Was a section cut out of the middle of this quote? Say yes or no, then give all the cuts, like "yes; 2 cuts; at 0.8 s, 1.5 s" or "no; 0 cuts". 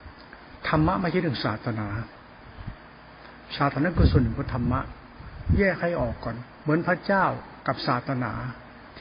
no; 0 cuts